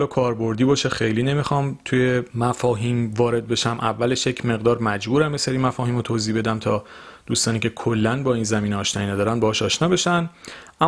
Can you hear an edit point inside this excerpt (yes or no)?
yes